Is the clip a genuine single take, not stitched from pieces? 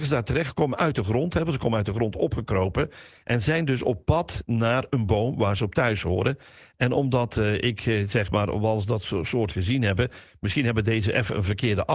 yes; 0 cuts

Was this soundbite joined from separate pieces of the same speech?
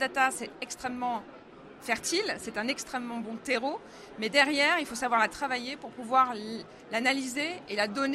no; 0 cuts

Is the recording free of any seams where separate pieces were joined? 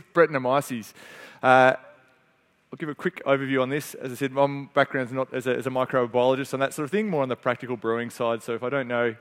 yes; 0 cuts

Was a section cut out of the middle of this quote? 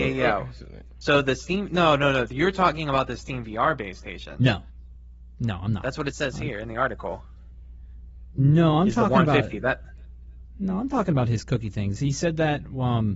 no; 0 cuts

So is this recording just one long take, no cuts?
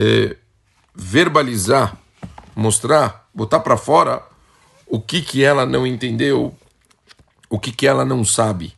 yes; 0 cuts

